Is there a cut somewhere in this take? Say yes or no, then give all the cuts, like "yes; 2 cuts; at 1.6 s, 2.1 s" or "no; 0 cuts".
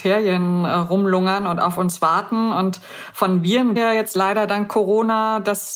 yes; 1 cut; at 3.8 s